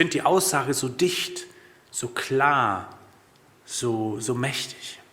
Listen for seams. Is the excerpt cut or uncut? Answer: uncut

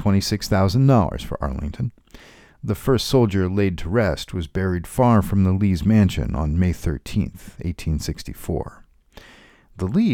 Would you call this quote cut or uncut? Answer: uncut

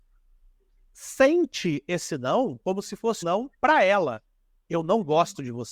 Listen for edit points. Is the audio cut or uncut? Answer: cut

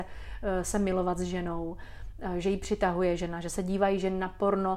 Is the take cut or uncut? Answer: uncut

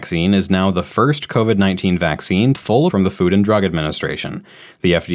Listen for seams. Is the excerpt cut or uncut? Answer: cut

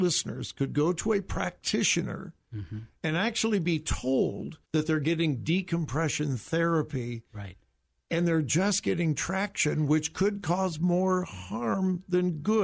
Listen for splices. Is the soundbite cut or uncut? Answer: cut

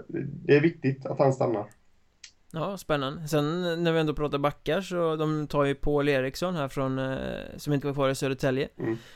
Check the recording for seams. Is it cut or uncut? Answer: cut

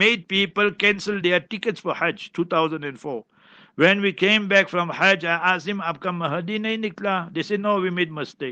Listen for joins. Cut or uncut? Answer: uncut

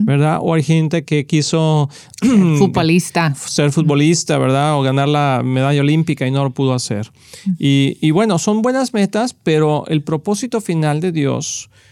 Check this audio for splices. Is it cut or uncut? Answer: uncut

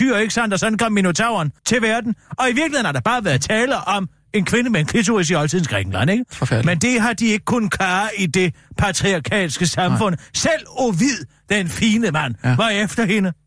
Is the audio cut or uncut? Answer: cut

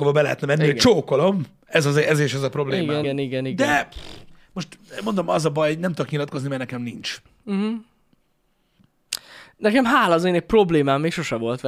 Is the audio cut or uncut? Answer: cut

